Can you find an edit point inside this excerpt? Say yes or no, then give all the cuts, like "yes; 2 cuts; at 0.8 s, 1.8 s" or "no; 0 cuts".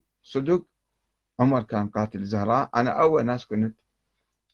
no; 0 cuts